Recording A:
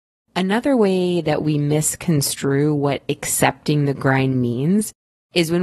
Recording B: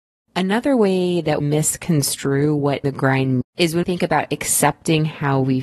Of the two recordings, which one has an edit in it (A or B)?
B